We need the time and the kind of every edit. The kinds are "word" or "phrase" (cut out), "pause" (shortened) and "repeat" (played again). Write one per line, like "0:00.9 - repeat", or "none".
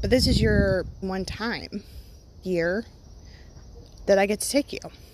0:01.0 - word
0:02.4 - word
0:04.0 - word